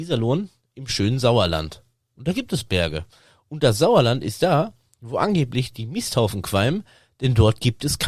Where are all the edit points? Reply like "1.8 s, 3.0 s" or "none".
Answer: none